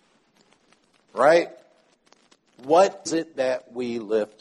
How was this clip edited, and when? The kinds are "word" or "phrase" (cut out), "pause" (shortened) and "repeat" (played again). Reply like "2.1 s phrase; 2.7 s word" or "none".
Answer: 3.1 s word